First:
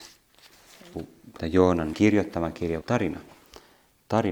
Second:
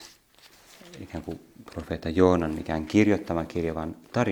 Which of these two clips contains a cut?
first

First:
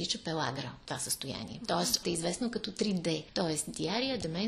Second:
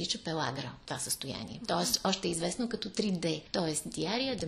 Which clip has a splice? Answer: first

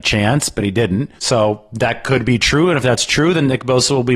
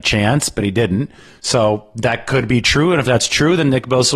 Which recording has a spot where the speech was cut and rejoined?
first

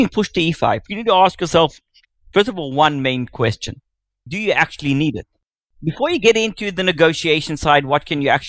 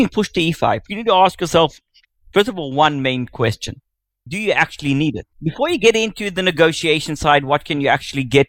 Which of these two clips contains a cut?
second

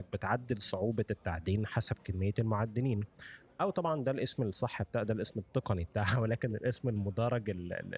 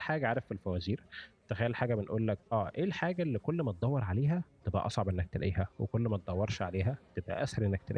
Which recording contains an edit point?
second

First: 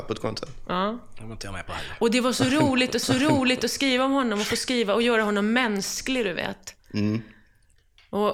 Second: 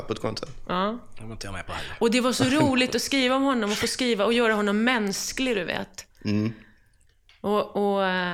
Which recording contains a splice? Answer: first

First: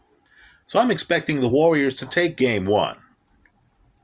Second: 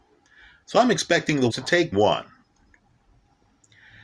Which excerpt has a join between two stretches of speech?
second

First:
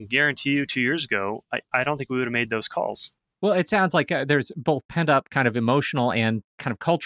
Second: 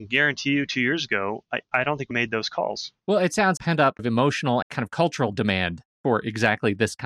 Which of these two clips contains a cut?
second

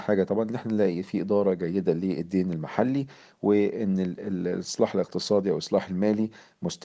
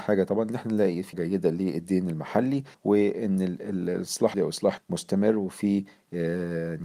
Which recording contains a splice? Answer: second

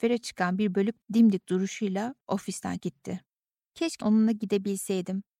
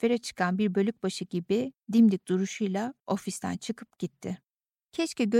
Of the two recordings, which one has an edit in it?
first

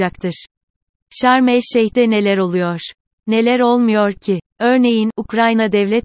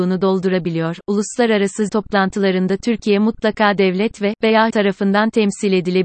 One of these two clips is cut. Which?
second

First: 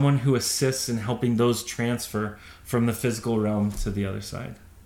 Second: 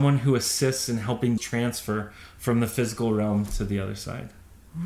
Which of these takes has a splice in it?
second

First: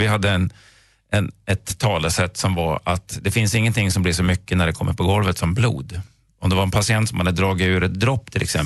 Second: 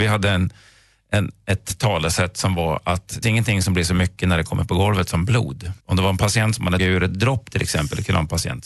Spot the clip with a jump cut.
second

